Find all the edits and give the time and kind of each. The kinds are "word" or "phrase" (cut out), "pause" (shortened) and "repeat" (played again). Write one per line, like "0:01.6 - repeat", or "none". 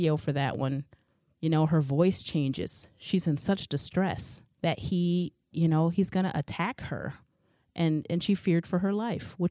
0:04.5 - pause